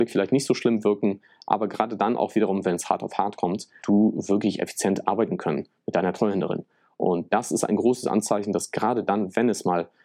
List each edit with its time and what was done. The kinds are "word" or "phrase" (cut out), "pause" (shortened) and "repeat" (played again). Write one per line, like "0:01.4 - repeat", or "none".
0:03.8 - word